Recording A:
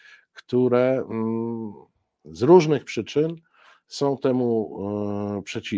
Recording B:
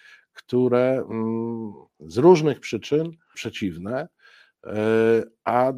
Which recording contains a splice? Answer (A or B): B